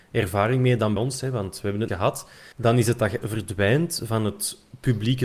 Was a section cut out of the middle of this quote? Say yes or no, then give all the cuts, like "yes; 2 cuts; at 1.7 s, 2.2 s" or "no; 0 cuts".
yes; 4 cuts; at 1.0 s, 1.9 s, 2.5 s, 3.2 s